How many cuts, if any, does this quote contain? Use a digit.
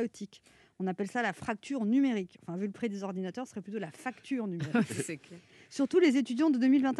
0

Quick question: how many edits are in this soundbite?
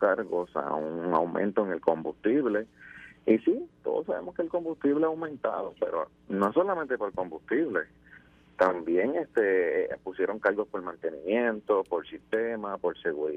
0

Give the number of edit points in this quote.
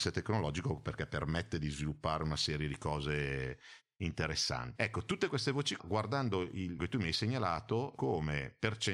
4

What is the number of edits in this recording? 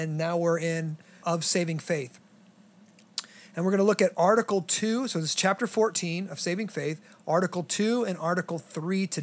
1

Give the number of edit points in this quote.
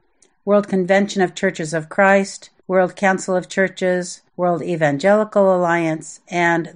2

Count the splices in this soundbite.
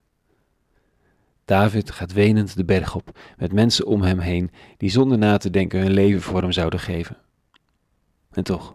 0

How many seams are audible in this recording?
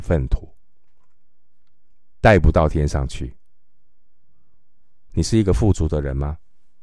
1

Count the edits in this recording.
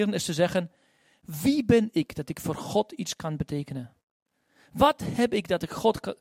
0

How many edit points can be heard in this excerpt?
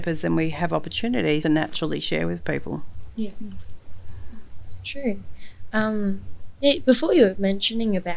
1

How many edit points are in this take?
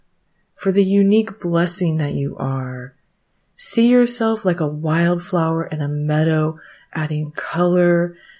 0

